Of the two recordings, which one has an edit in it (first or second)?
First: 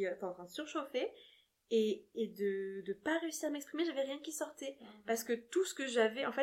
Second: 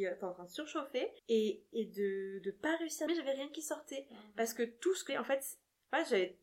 second